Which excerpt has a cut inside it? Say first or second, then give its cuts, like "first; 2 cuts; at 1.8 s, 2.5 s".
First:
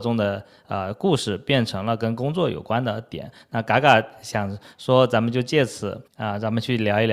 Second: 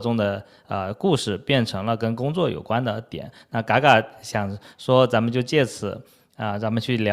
first; 1 cut; at 6.1 s